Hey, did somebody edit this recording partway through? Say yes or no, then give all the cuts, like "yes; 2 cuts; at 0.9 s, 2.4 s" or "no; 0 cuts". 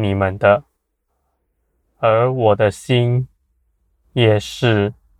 no; 0 cuts